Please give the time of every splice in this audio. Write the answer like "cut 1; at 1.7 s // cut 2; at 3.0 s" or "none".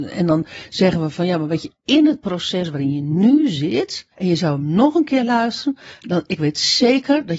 cut 1; at 4.1 s